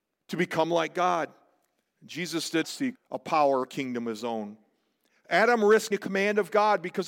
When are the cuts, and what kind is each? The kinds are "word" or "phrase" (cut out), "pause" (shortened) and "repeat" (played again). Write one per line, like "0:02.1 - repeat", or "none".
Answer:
0:02.6 - word
0:02.9 - word
0:03.6 - word
0:05.9 - word